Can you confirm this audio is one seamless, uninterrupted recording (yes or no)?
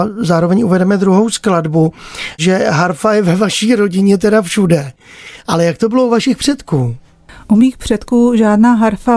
yes